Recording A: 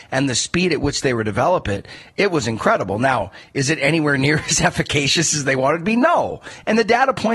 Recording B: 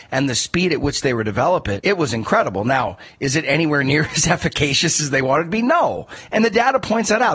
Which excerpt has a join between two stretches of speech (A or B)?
B